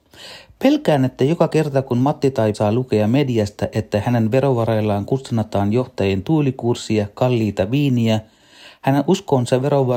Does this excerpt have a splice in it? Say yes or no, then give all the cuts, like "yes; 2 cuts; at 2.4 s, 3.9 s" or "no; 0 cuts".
yes; 1 cut; at 2.5 s